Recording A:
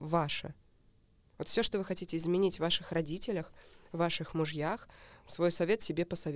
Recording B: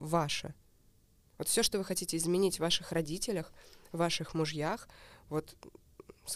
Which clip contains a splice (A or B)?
A